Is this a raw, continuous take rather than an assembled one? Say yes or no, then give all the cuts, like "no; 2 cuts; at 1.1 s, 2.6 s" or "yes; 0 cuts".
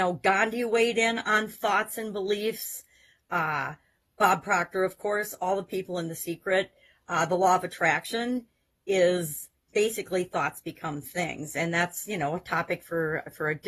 yes; 0 cuts